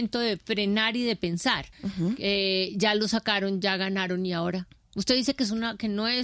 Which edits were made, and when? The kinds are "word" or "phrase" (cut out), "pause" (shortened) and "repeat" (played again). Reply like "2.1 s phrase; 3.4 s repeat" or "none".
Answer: 1.7 s pause; 4.8 s pause